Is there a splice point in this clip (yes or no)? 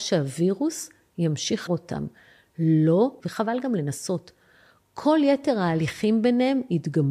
yes